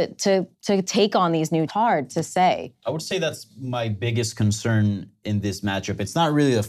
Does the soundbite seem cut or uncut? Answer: cut